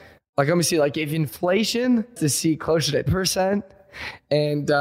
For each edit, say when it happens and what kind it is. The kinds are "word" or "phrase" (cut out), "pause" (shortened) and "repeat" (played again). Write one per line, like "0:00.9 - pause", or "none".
0:02.2 - word
0:03.1 - word